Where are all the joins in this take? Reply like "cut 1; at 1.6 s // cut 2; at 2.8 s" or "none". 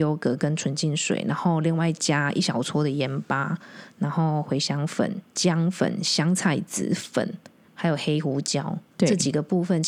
cut 1; at 5.3 s // cut 2; at 7.7 s